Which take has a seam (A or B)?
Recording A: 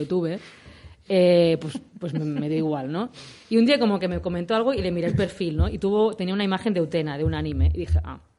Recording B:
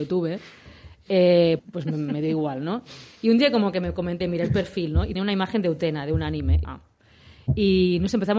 B